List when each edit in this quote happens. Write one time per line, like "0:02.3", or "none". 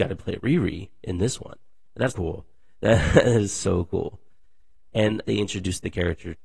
0:02.1
0:05.2